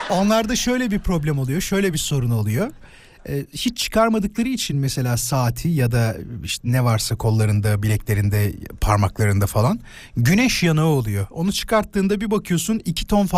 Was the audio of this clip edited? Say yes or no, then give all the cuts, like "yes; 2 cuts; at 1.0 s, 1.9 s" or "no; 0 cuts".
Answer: no; 0 cuts